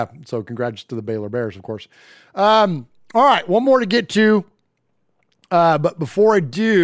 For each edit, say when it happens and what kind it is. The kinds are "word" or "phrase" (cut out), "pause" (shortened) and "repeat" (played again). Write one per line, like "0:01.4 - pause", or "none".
none